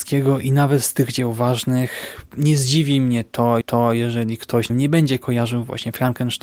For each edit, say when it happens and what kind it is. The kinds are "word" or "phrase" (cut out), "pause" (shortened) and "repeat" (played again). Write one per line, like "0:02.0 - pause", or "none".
0:02.3 - pause
0:03.6 - repeat
0:04.7 - phrase